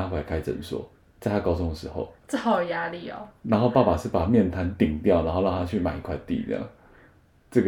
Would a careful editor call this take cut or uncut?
cut